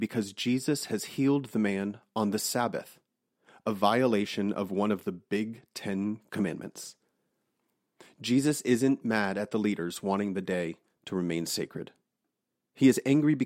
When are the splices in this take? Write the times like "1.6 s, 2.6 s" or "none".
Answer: none